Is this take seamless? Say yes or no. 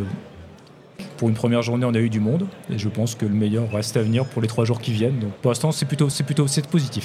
no